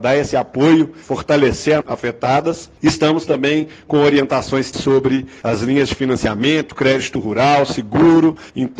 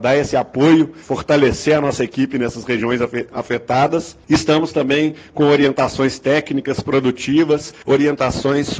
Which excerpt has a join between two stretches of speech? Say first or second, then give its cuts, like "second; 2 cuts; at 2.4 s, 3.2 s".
first; 2 cuts; at 1.8 s, 4.7 s